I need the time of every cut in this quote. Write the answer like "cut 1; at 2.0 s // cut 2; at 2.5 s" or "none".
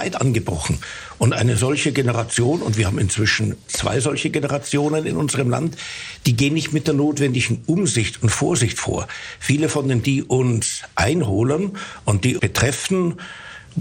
cut 1; at 3.7 s // cut 2; at 10.0 s // cut 3; at 12.4 s